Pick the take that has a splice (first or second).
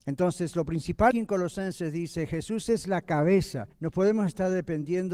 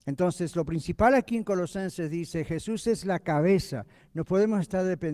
first